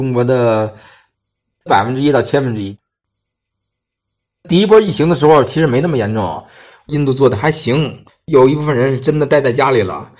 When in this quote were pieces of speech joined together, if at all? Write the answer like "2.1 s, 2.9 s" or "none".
8.1 s